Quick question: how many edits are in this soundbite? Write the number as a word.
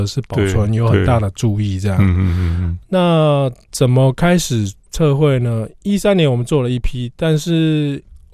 three